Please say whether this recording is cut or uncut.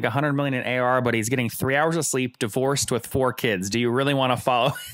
uncut